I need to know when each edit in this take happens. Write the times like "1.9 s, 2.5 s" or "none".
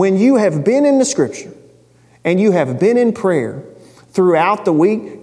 none